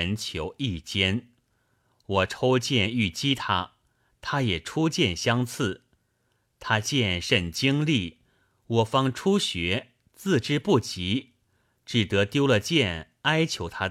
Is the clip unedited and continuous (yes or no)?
yes